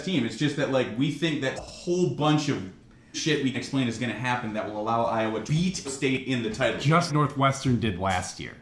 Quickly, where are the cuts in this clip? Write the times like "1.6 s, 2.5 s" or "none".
1.6 s, 3.1 s, 3.5 s, 5.5 s, 5.8 s, 7.1 s